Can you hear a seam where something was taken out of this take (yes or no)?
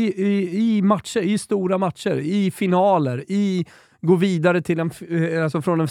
no